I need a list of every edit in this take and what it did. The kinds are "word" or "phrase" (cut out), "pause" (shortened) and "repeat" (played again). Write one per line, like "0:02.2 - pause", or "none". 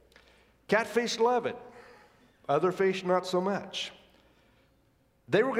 none